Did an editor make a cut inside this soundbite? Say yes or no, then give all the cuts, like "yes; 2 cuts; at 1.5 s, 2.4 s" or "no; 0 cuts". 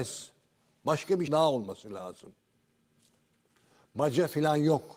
yes; 1 cut; at 1.3 s